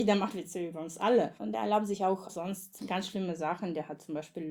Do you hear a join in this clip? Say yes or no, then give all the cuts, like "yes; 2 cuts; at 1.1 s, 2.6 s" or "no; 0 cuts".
no; 0 cuts